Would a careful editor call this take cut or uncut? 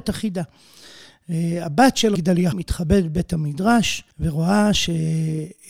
cut